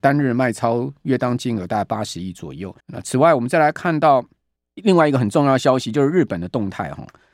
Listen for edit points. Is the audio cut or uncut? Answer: cut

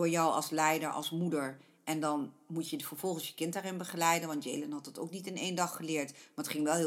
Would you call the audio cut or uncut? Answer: uncut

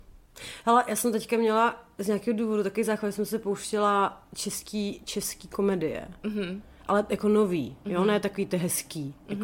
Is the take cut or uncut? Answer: uncut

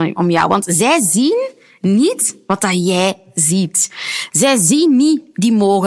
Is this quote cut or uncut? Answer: uncut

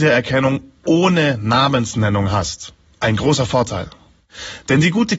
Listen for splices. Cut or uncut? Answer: uncut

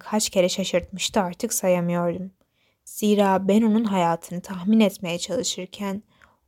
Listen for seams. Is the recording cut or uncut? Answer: uncut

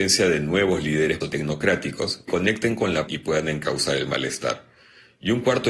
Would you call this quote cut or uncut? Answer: cut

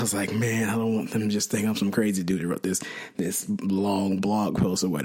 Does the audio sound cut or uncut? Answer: uncut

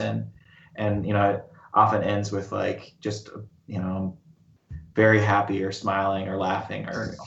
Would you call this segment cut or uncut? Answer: uncut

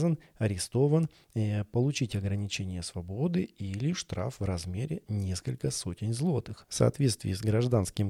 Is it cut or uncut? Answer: uncut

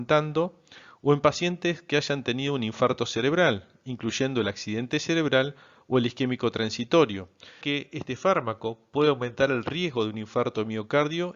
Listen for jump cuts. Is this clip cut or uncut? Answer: cut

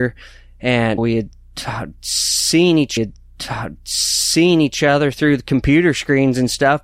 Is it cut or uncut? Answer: cut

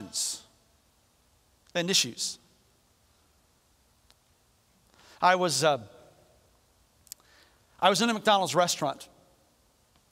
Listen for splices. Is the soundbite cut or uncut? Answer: uncut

